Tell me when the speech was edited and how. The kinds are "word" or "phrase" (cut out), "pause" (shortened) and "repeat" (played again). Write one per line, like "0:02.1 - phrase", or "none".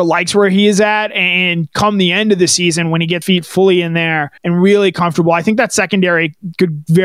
0:03.2 - word
0:04.4 - pause